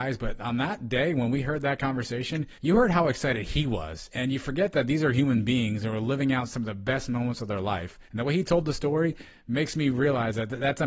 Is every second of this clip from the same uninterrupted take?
no; 2 cuts; at 2.6 s, 8.1 s

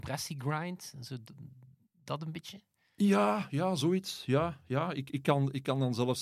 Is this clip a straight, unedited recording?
yes; 0 cuts

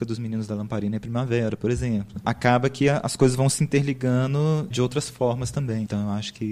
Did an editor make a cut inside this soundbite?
yes; 1 cut; at 4.7 s

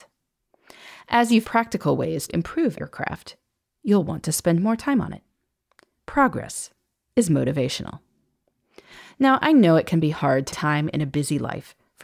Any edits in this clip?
yes; 4 cuts; at 1.4 s, 2.3 s, 2.8 s, 10.5 s

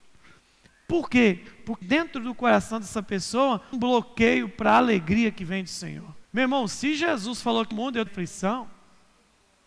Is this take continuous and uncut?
no; 5 cuts; at 1.8 s, 3.7 s, 6.2 s, 7.7 s, 8.1 s

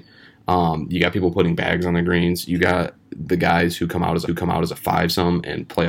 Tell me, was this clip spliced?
yes; 1 cut; at 4.3 s

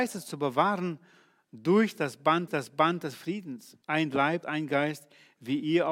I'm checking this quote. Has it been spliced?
yes; 3 cuts; at 2.5 s, 3.8 s, 4.4 s

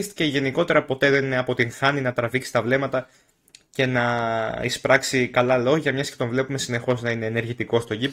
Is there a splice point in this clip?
no; 0 cuts

